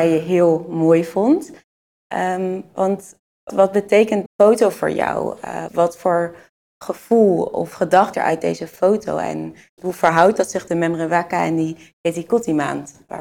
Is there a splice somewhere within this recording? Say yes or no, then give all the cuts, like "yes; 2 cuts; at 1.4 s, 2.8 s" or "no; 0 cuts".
yes; 6 cuts; at 3.5 s, 4.3 s, 5.7 s, 8.1 s, 9.8 s, 10.7 s